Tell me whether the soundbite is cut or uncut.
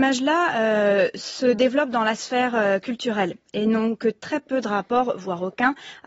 uncut